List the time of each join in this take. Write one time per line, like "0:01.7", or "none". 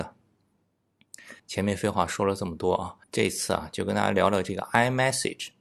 0:01.4
0:03.0